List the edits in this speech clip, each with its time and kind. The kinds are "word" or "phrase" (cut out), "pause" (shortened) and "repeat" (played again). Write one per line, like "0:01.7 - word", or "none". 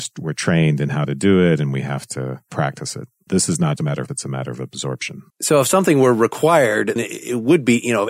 0:03.8 - word
0:04.1 - word
0:05.3 - pause
0:07.0 - word